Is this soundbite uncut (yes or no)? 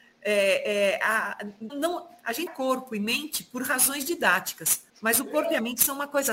no